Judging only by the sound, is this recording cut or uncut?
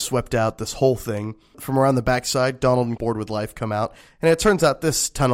cut